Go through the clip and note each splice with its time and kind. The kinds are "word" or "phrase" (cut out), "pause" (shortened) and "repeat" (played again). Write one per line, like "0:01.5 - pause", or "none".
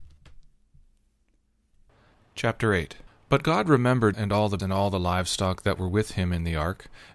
0:04.1 - word
0:04.6 - word

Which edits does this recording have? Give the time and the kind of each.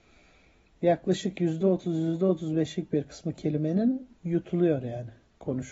0:04.2 - pause

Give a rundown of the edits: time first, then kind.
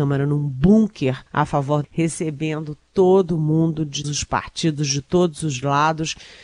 0:01.3 - pause
0:01.8 - word
0:04.0 - word

